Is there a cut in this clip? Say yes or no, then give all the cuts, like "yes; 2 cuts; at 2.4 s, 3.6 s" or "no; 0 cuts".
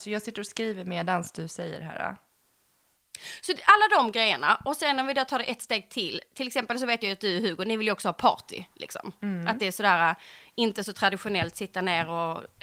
no; 0 cuts